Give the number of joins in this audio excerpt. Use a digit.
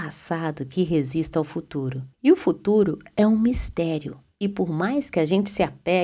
1